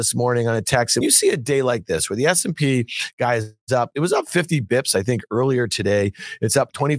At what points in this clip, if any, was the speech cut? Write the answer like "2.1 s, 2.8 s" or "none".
1.0 s